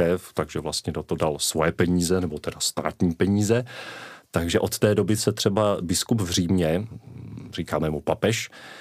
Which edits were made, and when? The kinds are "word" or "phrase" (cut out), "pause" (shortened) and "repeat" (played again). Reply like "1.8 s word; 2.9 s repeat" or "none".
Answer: none